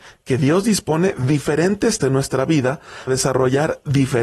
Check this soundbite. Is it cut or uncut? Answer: cut